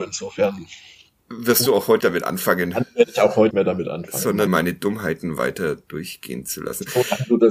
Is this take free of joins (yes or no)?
no